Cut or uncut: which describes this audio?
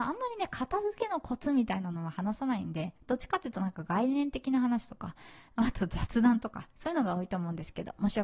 uncut